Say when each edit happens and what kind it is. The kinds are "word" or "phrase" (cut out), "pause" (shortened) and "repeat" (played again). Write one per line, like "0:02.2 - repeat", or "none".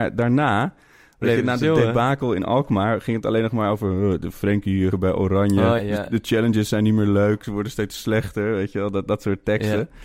0:04.9 - phrase
0:05.8 - word